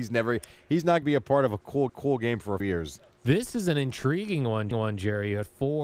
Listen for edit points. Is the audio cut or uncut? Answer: cut